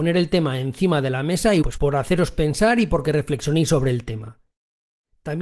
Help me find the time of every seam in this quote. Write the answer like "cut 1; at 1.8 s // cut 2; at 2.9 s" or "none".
cut 1; at 1.6 s